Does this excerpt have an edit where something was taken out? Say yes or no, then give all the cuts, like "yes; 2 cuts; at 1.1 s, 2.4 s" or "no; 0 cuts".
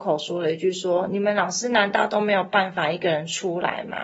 no; 0 cuts